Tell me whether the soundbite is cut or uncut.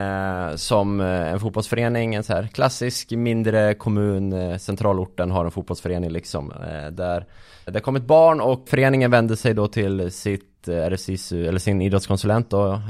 cut